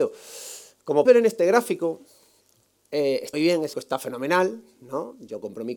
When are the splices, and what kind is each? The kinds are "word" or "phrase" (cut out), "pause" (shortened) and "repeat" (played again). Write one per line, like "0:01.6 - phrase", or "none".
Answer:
0:01.1 - word
0:03.3 - word
0:03.7 - word